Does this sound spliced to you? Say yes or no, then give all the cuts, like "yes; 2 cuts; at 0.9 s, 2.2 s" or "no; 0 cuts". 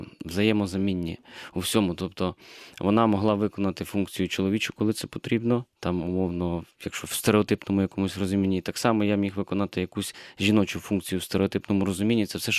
no; 0 cuts